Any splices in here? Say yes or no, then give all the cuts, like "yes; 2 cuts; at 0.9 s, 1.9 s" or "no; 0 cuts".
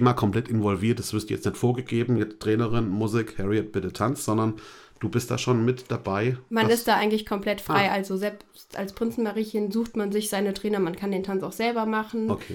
no; 0 cuts